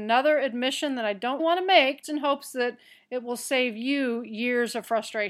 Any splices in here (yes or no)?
yes